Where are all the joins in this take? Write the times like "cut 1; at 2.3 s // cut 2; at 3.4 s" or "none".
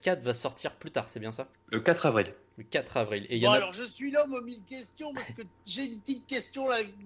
cut 1; at 1.5 s